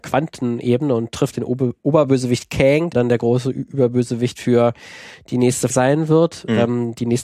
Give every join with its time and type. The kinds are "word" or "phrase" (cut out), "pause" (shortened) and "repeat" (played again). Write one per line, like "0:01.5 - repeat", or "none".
0:01.3 - phrase
0:02.9 - word
0:05.7 - word